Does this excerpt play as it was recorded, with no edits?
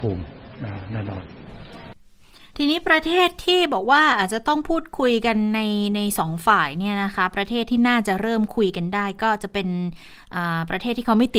no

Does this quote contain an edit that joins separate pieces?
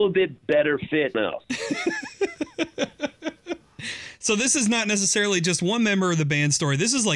yes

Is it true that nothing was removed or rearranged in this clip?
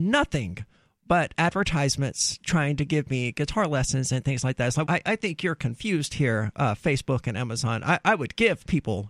no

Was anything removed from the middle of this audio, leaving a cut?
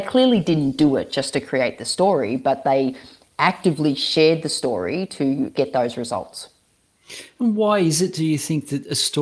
no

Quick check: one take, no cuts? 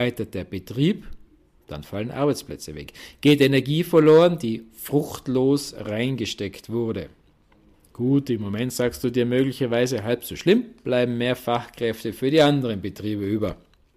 yes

